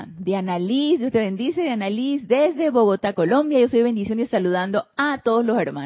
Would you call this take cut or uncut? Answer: uncut